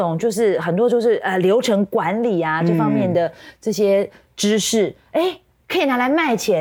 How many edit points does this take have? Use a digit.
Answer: 1